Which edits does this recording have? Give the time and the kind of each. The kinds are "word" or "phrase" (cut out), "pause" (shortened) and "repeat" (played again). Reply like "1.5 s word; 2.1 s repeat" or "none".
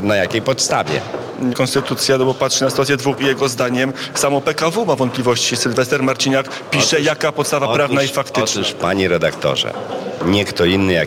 1.5 s word; 3.2 s word